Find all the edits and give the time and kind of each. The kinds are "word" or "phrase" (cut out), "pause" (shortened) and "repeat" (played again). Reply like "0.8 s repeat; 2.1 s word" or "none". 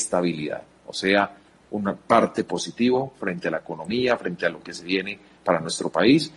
none